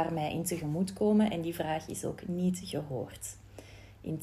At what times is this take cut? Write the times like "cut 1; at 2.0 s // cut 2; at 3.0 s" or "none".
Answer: none